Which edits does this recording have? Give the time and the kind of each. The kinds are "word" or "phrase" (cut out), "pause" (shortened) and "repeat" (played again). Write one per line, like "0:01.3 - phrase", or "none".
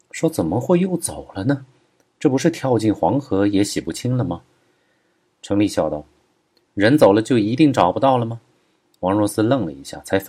none